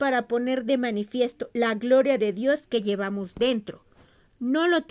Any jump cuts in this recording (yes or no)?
no